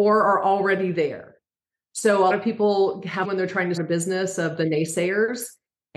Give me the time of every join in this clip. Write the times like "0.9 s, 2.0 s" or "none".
2.3 s, 3.2 s, 3.8 s